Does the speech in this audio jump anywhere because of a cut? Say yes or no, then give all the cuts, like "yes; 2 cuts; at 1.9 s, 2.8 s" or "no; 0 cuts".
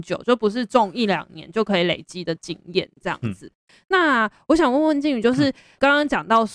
no; 0 cuts